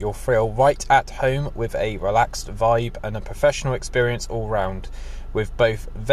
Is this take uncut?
yes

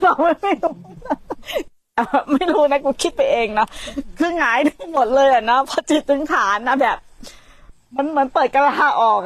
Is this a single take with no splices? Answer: yes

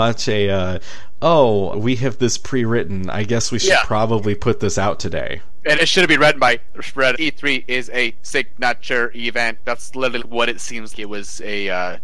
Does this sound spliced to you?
yes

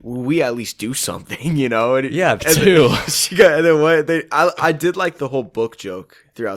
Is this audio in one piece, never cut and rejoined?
yes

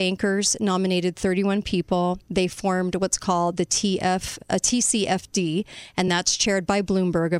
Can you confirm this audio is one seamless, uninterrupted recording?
yes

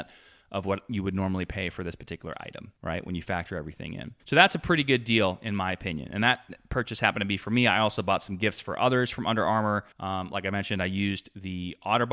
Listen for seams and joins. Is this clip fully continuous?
no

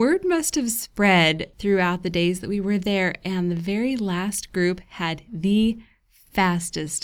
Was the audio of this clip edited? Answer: no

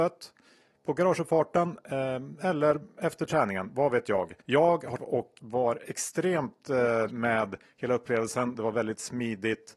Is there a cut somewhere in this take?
yes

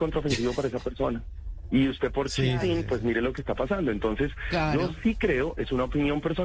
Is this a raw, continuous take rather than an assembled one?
yes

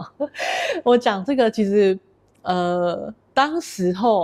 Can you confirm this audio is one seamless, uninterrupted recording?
yes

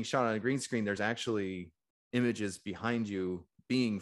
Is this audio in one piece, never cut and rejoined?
yes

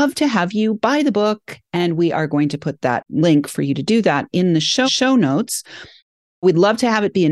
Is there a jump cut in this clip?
yes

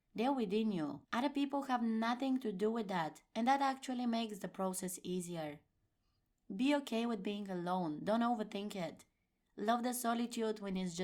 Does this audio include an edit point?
yes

